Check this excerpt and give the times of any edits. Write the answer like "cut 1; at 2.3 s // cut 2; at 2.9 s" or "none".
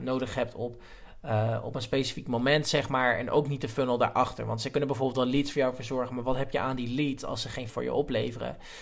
cut 1; at 7.7 s